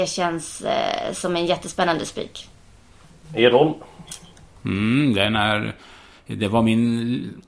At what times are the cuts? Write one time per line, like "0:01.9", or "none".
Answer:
none